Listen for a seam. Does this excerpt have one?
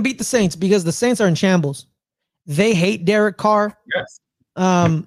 no; 0 cuts

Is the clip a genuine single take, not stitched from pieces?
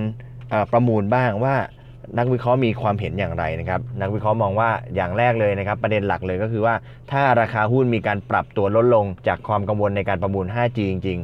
no; 1 cut; at 9.2 s

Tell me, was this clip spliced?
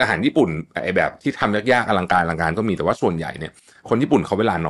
no; 0 cuts

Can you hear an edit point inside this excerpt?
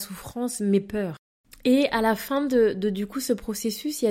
no; 0 cuts

